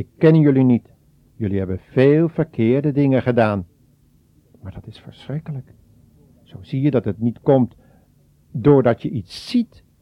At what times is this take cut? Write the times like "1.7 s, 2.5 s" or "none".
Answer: none